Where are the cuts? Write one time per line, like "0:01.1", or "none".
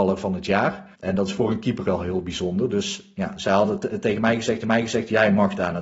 0:00.9
0:01.8
0:04.6